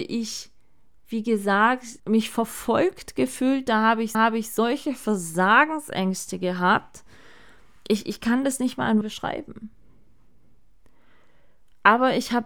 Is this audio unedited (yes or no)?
no